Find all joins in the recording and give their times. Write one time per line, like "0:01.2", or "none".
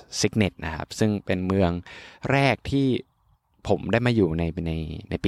0:03.3